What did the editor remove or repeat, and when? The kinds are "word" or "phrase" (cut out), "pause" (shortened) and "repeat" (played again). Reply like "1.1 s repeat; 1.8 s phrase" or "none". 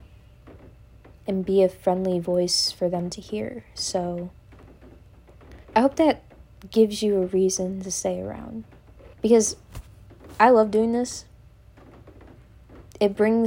5.6 s pause; 9.1 s pause

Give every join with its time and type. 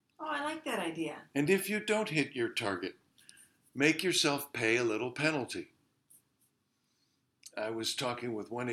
none

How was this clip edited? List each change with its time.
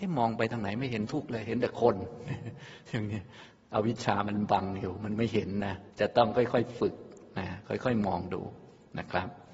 5.9 s pause

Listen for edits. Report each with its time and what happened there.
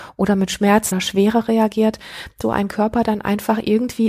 0.9 s word; 2.4 s word

